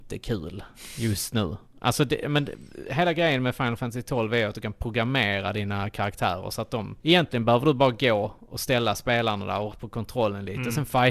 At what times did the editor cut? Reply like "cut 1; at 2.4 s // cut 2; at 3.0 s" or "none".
cut 1; at 7.0 s // cut 2; at 9.7 s